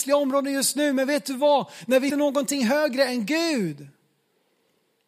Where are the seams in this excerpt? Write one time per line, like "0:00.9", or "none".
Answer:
0:02.1